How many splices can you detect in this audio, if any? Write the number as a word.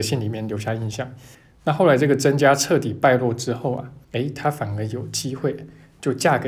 two